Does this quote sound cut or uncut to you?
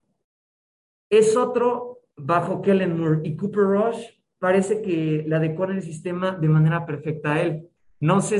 cut